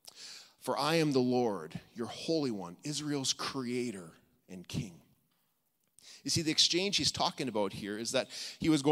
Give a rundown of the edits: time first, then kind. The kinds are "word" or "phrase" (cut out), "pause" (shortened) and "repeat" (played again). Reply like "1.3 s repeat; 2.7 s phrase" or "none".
none